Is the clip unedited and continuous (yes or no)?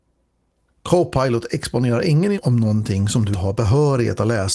no